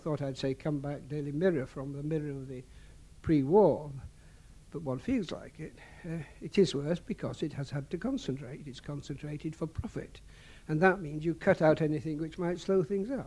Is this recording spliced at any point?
no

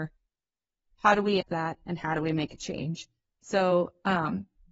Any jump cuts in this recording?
yes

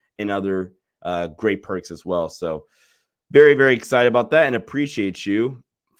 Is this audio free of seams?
yes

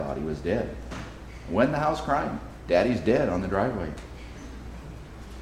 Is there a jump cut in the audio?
no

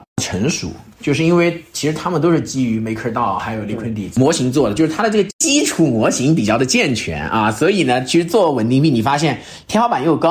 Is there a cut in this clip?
no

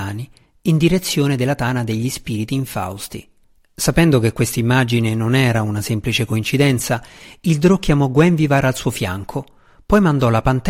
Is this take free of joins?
no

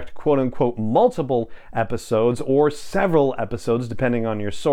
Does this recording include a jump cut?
no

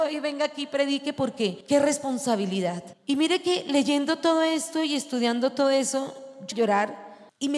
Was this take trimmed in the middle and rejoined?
yes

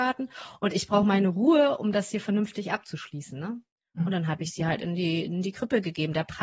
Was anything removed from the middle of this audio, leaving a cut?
no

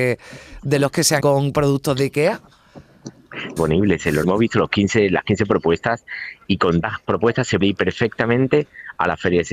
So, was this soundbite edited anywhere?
yes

